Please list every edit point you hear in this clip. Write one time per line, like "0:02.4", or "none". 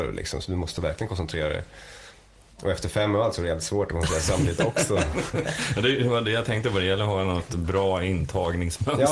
none

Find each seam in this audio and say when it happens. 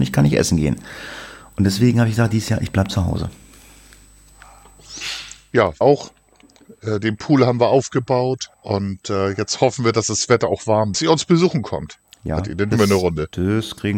0:05.8
0:08.5
0:10.9
0:12.7

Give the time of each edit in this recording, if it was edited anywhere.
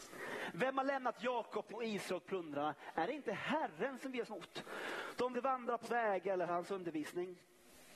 0:01.7
0:04.3
0:05.3
0:05.8
0:06.5

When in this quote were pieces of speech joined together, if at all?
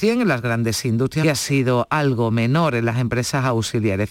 0:01.2

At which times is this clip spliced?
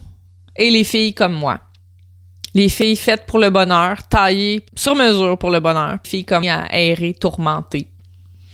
0:04.7
0:06.0
0:06.4

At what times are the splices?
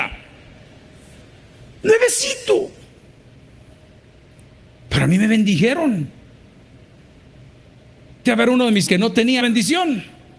0:08.3
0:08.9
0:09.4

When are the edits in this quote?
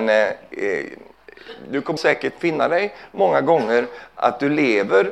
0:02.0

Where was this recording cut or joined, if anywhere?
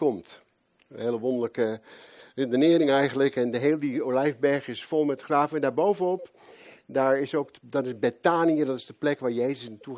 none

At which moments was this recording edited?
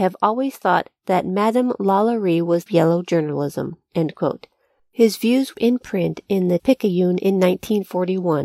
0:02.7
0:05.5
0:06.6

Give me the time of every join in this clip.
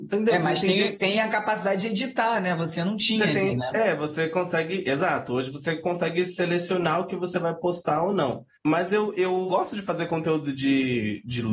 0:08.6

